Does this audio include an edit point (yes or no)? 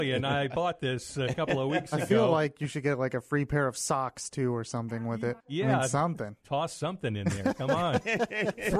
yes